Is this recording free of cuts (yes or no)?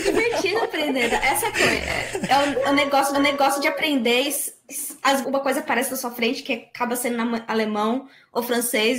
no